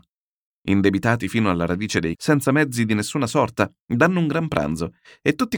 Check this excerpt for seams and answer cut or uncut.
cut